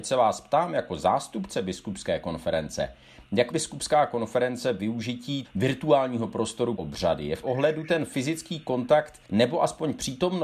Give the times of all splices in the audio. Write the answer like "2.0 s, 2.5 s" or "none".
3.5 s, 5.4 s, 6.8 s, 7.4 s, 9.2 s